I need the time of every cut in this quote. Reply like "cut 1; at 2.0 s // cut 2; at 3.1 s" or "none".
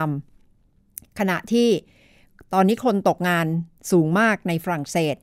none